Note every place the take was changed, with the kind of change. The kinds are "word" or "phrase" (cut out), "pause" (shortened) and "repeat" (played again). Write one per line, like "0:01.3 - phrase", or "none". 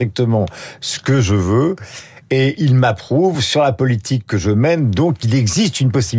none